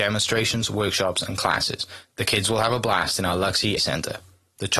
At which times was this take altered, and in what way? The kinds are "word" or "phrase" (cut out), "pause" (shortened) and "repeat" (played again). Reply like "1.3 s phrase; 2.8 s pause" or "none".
3.8 s word